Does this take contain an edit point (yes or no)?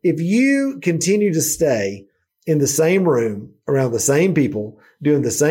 no